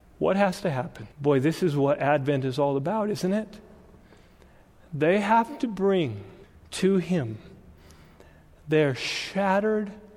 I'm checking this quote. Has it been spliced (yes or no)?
yes